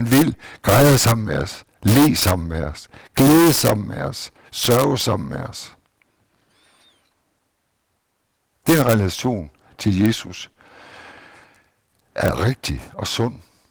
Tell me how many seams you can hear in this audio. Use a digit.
0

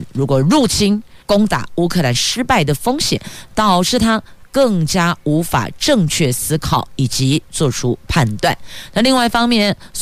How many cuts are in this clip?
1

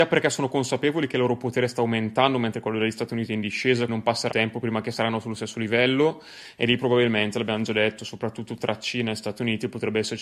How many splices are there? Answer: 2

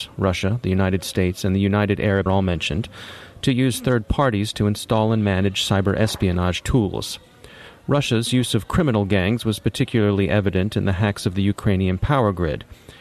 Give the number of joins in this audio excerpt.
1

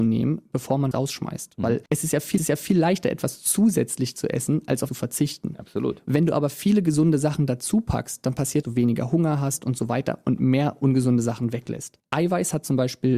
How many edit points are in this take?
5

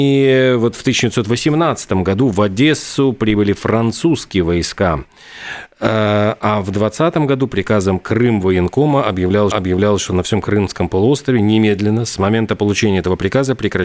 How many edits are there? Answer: 1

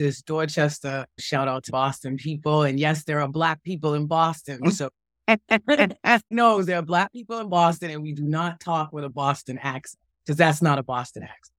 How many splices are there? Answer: 4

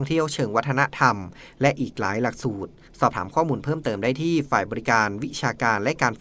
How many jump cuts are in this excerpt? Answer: 0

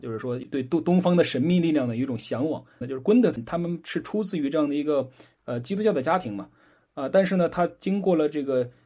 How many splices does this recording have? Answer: 0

